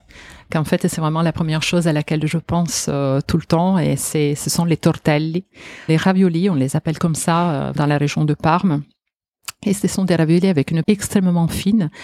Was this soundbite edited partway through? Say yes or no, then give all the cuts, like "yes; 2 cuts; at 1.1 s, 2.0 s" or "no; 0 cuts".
yes; 3 cuts; at 5.9 s, 7.8 s, 10.8 s